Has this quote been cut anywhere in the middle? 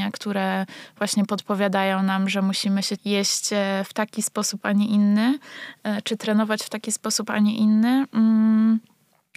yes; 1 cut; at 3.0 s

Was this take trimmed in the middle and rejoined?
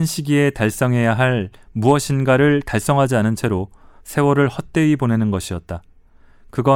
no; 0 cuts

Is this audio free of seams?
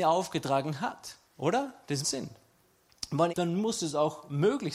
no; 3 cuts; at 1.3 s, 2.0 s, 3.3 s

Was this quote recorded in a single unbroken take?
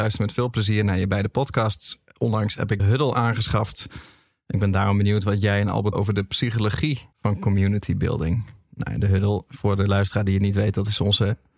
no; 3 cuts; at 2.8 s, 5.9 s, 7.1 s

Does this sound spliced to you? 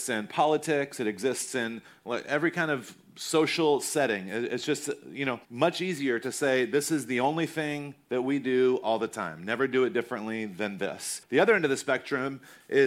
yes; 2 cuts; at 5.4 s, 11.2 s

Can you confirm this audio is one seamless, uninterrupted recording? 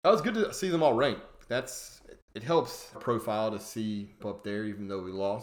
no; 2 cuts; at 2.9 s, 4.2 s

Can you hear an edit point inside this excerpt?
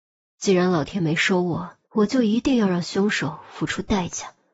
yes; 1 cut; at 1.8 s

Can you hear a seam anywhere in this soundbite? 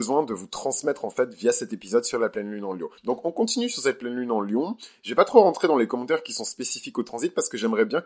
yes; 1 cut; at 3.0 s

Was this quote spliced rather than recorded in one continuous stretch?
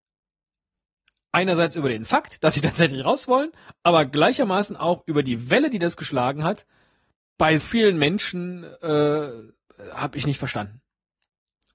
yes; 1 cut; at 7.6 s

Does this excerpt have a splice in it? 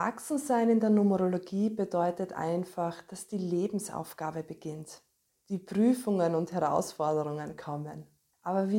no; 0 cuts

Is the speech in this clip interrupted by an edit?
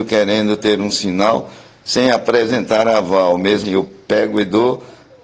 yes; 1 cut; at 3.6 s

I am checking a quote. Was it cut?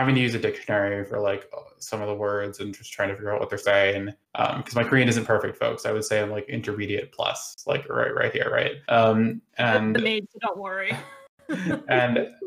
yes; 2 cuts; at 4.2 s, 8.8 s

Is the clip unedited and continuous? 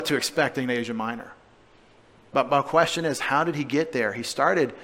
yes; 0 cuts

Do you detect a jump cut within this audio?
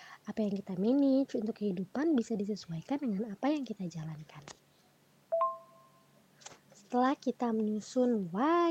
no; 0 cuts

